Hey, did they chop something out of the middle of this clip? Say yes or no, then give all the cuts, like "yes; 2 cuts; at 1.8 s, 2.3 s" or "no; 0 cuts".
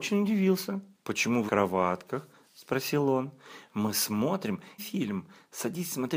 yes; 3 cuts; at 0.9 s, 1.5 s, 4.8 s